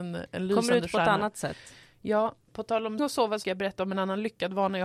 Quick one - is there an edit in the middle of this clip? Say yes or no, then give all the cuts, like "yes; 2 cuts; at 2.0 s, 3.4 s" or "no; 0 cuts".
yes; 3 cuts; at 2.5 s, 3.0 s, 3.4 s